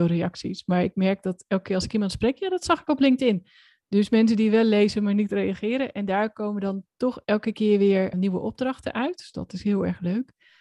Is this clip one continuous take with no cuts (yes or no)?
no